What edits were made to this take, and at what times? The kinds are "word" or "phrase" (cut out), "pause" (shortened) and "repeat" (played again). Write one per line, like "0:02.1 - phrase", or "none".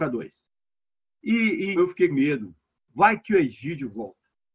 0:01.8 - word
0:02.1 - word